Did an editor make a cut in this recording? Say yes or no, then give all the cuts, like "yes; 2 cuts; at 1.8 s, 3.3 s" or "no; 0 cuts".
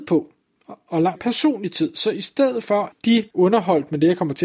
yes; 3 cuts; at 1.2 s, 2.9 s, 3.3 s